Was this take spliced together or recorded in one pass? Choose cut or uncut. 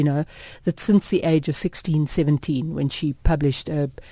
uncut